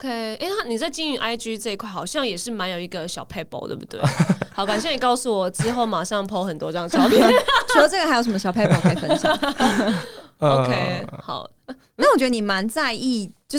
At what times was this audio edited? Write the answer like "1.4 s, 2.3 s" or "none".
none